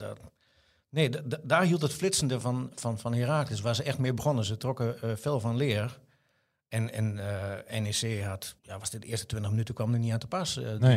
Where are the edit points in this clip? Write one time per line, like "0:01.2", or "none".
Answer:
0:08.6